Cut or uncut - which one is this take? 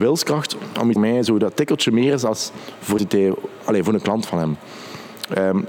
cut